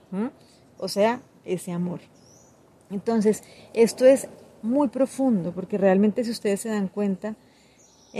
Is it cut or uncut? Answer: uncut